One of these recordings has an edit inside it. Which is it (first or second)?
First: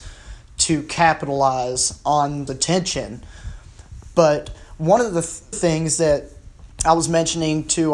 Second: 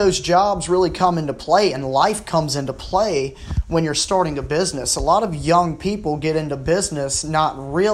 first